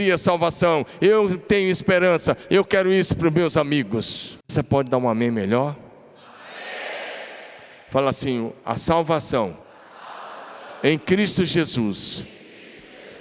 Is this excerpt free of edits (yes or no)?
no